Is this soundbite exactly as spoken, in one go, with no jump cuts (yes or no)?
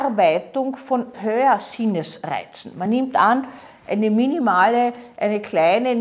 yes